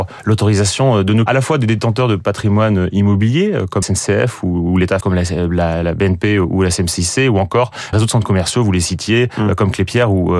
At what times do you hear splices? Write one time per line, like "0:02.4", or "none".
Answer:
0:01.3
0:03.8
0:05.0
0:07.9